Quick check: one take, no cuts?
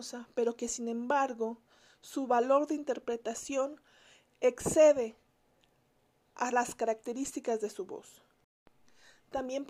yes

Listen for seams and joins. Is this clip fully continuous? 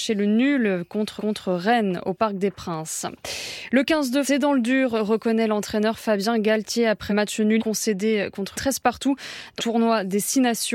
no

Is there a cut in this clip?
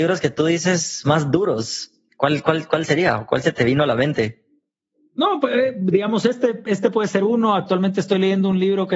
no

